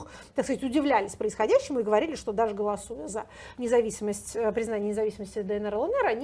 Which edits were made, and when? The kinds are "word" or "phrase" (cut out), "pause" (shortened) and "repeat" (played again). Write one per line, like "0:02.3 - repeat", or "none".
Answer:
none